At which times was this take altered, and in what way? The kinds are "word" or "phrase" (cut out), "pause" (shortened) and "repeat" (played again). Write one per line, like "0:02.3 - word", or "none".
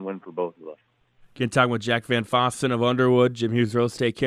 none